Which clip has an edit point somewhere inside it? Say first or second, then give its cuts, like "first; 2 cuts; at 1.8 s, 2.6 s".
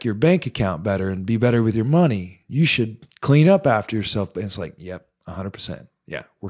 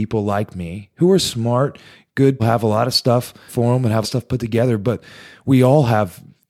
second; 3 cuts; at 2.4 s, 3.5 s, 4.0 s